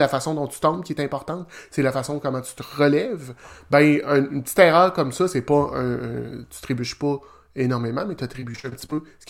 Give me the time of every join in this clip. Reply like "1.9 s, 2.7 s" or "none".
none